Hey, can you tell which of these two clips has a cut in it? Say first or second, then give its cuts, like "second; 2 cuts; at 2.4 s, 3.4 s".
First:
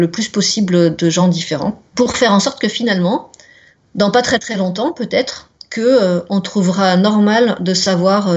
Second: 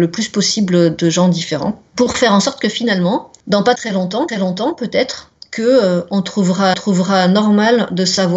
second; 4 cuts; at 3.4 s, 3.8 s, 4.3 s, 6.7 s